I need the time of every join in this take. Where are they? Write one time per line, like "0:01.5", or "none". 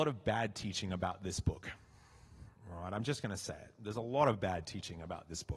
none